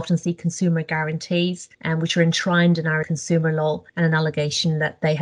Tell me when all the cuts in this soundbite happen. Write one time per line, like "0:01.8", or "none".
0:01.7
0:03.0
0:03.9